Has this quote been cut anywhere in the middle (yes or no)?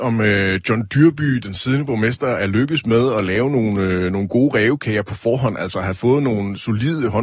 no